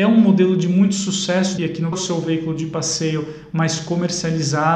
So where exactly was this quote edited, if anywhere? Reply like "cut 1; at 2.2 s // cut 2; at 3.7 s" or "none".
cut 1; at 1.6 s // cut 2; at 1.9 s